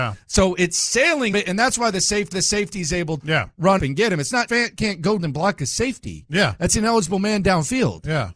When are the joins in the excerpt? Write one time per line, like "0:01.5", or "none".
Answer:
0:01.3
0:02.3
0:03.2
0:03.8
0:04.5
0:05.2